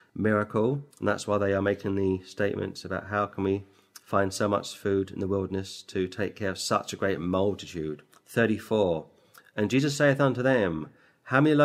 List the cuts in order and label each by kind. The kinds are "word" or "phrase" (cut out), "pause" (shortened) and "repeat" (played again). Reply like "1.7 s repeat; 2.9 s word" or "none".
0.9 s pause